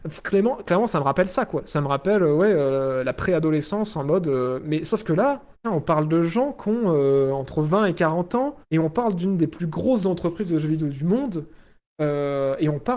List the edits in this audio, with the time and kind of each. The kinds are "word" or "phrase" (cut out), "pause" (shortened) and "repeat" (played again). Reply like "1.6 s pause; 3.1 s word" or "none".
5.5 s pause; 8.6 s pause